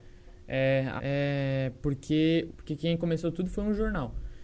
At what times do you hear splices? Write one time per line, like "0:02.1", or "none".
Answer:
0:01.0
0:02.5